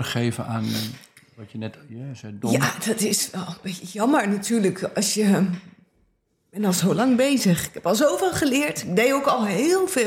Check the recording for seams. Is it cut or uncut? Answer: uncut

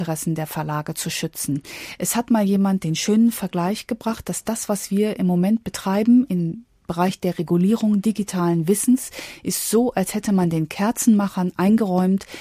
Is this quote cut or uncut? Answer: uncut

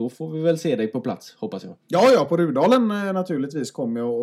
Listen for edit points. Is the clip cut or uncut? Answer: uncut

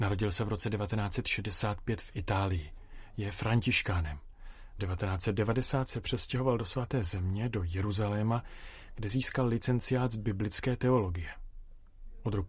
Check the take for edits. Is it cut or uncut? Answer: cut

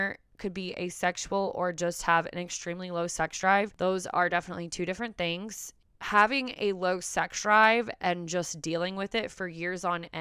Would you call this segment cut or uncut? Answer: uncut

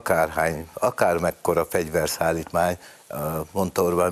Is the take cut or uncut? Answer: uncut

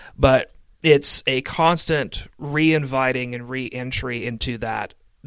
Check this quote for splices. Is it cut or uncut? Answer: uncut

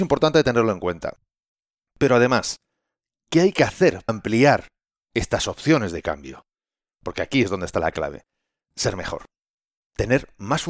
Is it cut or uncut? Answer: cut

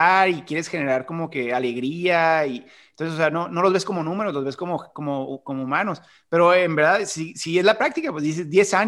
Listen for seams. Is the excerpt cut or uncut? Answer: uncut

